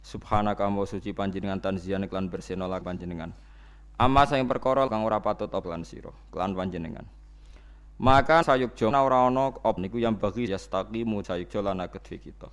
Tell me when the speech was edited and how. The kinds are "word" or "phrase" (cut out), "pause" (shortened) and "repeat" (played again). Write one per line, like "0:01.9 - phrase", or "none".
0:02.8 - word
0:04.9 - word
0:05.6 - word
0:08.4 - word
0:08.9 - word
0:09.8 - word
0:10.5 - word
0:11.2 - word

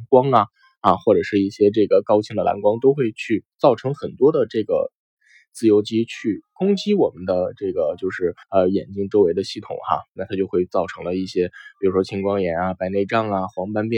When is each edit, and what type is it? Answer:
0:03.5 - pause
0:08.4 - pause

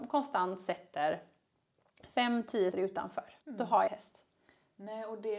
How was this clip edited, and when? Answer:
0:02.7 - word
0:03.4 - pause
0:03.9 - phrase

